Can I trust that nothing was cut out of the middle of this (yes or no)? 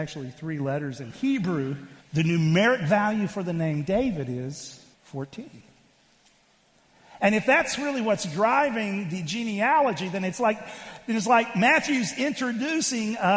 no